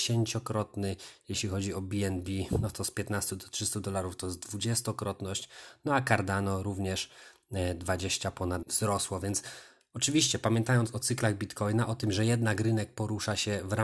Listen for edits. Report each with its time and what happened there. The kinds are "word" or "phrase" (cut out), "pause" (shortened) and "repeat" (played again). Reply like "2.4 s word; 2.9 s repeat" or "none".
8.6 s word